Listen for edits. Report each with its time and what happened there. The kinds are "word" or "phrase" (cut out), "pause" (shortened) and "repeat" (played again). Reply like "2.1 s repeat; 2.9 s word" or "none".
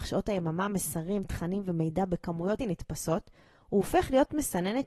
2.6 s word